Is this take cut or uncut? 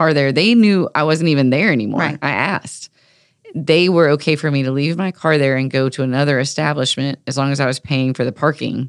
uncut